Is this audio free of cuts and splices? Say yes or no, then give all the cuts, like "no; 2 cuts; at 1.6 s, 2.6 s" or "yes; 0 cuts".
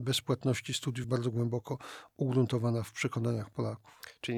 no; 1 cut; at 1.0 s